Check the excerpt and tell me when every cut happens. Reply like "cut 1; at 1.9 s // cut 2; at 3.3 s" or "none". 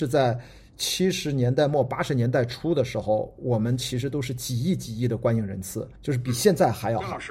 cut 1; at 6.0 s